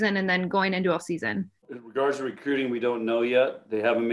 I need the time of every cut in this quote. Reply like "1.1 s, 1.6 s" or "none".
1.0 s, 1.6 s